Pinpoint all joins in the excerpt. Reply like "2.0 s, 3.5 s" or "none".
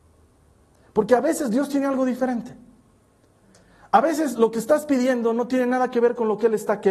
none